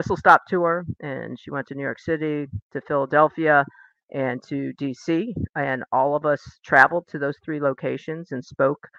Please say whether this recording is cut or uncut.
uncut